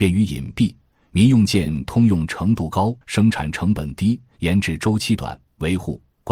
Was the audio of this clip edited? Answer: yes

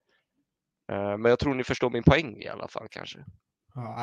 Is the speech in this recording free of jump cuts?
yes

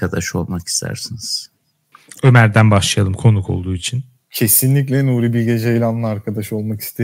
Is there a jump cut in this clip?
no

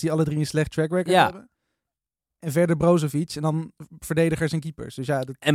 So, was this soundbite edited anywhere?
no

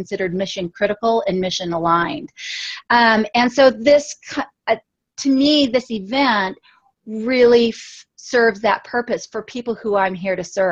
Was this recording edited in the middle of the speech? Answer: no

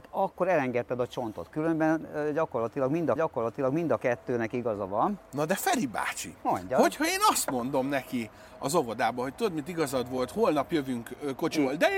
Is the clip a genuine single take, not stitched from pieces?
no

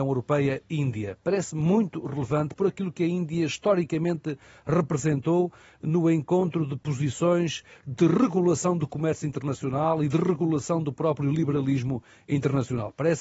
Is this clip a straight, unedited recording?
yes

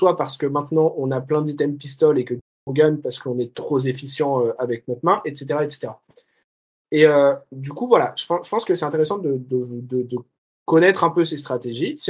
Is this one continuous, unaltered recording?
yes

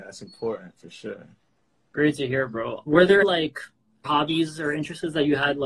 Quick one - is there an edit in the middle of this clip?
yes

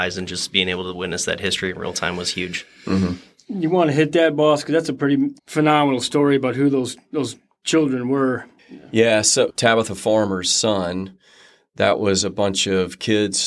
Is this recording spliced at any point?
yes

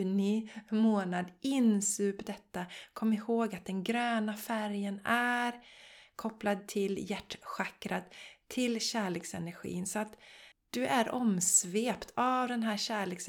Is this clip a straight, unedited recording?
no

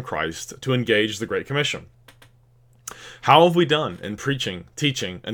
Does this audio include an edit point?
no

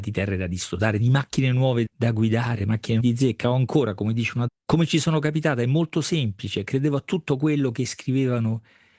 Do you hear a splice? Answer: yes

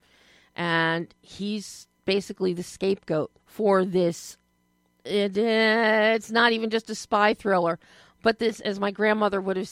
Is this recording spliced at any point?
yes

